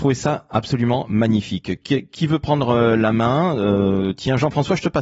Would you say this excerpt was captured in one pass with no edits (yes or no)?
yes